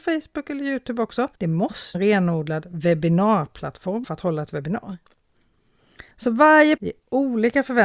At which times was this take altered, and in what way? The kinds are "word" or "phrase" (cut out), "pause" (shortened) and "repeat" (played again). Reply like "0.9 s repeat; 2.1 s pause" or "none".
1.3 s pause; 1.9 s phrase; 4.0 s word; 6.1 s pause; 6.8 s word